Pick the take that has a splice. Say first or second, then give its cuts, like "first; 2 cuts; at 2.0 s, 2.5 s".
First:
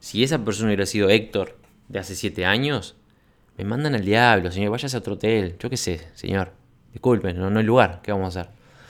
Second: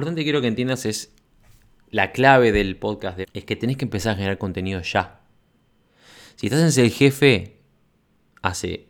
second; 1 cut; at 3.2 s